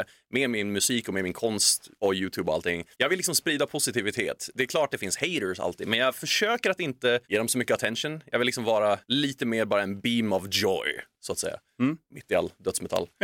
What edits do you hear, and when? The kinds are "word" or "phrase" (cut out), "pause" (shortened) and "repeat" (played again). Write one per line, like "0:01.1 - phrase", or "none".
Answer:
0:02.0 - pause
0:02.9 - pause
0:07.2 - pause
0:09.0 - pause